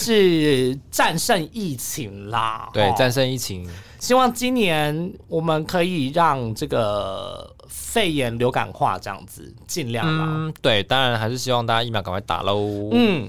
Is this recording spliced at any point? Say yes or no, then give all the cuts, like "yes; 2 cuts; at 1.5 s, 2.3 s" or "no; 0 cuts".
no; 0 cuts